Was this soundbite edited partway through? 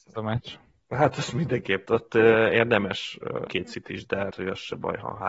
yes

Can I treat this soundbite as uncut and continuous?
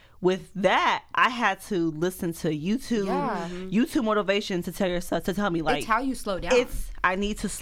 yes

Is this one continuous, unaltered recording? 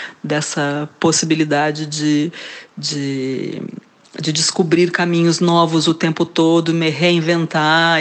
yes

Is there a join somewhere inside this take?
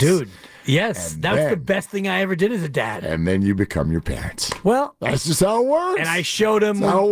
no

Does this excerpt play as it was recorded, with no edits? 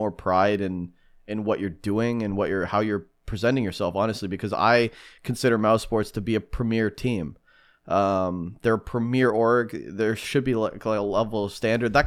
yes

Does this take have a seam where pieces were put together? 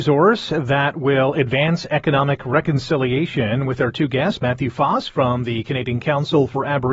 no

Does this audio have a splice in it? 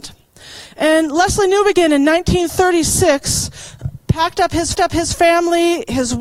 yes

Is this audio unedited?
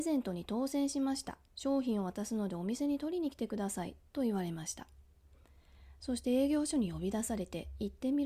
no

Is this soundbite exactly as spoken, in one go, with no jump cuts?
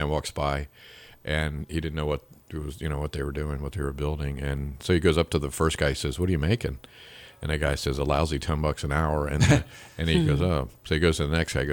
yes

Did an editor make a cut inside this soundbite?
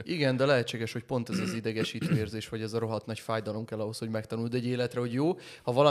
no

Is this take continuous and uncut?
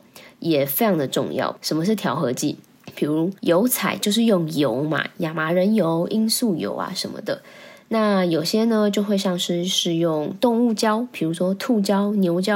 no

